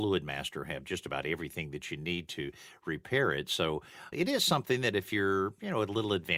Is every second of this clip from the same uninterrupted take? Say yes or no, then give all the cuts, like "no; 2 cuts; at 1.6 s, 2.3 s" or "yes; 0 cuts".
no; 1 cut; at 4.1 s